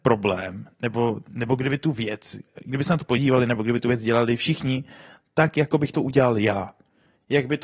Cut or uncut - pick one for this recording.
uncut